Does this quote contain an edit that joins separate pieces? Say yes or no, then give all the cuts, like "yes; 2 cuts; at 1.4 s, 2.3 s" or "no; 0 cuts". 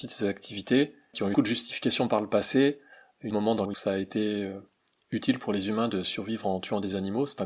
yes; 3 cuts; at 1.3 s, 3.3 s, 3.7 s